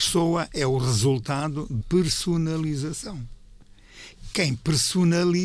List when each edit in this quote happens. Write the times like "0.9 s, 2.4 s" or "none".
1.8 s